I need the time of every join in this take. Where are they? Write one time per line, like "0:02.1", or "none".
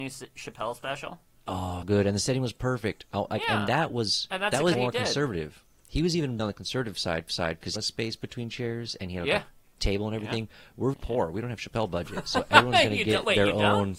0:01.8
0:04.7
0:06.4
0:07.3
0:07.8
0:10.9